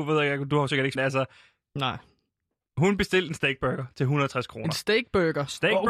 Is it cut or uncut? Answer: cut